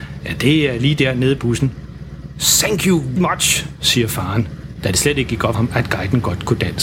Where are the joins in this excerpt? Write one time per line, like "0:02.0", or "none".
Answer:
0:01.4
0:03.2
0:05.5